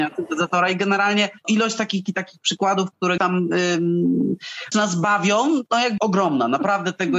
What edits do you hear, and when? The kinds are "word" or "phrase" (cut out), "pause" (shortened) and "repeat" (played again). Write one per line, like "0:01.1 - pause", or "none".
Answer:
0:01.4 - word
0:02.1 - word
0:03.2 - word
0:04.7 - word
0:06.0 - word